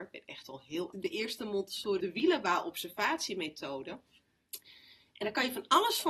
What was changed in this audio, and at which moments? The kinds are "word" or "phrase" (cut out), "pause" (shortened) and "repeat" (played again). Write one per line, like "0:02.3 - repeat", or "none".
0:00.9 - phrase
0:02.0 - word